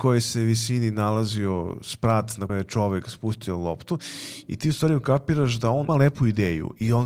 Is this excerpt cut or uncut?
cut